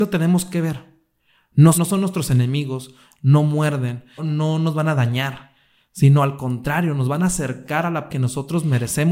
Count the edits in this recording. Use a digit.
3